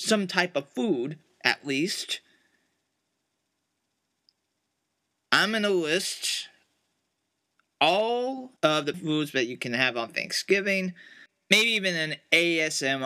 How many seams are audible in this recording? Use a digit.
2